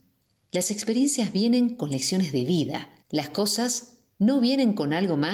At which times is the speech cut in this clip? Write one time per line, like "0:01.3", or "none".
0:03.0

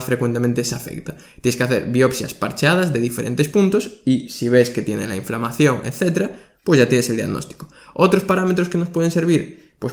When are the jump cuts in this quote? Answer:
none

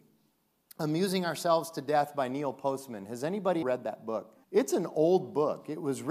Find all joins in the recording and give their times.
0:03.6
0:04.4

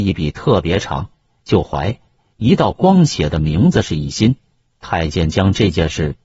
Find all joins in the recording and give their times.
none

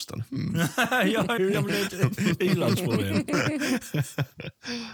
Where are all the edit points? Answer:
0:01.4

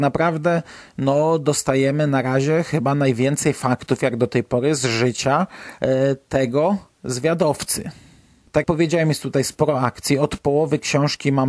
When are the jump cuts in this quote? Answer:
0:08.6

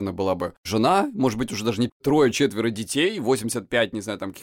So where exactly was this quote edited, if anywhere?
0:01.9

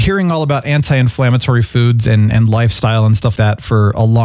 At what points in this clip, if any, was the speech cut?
0:03.4

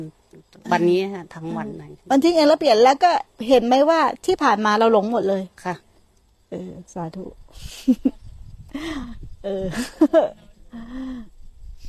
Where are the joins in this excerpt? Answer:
0:05.5

